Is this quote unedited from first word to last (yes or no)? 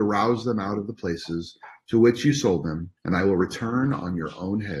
no